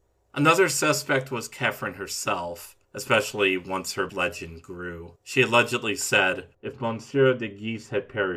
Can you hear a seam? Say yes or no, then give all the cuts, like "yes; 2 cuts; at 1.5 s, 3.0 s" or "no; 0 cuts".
yes; 4 cuts; at 2.8 s, 4.1 s, 5.2 s, 6.5 s